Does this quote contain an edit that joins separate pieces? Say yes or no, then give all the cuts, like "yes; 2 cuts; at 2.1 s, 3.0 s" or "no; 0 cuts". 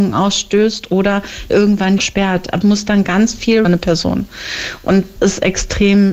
yes; 5 cuts; at 1.5 s, 2.0 s, 2.6 s, 3.6 s, 5.2 s